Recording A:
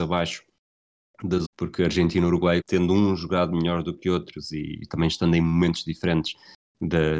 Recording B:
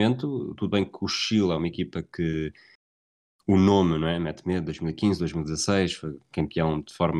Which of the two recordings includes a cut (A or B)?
A